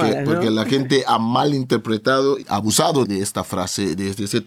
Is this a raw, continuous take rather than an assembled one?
no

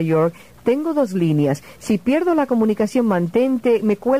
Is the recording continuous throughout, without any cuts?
yes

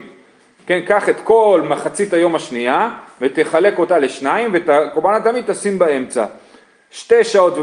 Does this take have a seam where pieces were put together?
no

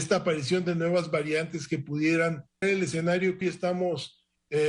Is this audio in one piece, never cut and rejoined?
no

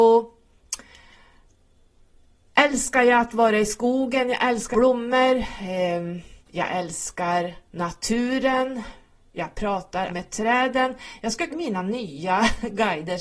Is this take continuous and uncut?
no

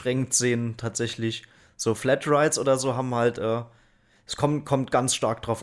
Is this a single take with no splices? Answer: yes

